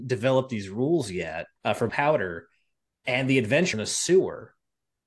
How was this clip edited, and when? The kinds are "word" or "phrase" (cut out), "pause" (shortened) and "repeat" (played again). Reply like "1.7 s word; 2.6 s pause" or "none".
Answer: 1.6 s pause; 1.9 s word; 3.7 s word